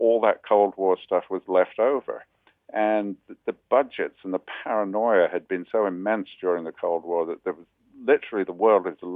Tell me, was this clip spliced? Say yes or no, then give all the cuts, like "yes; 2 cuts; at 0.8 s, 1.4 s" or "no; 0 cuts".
no; 0 cuts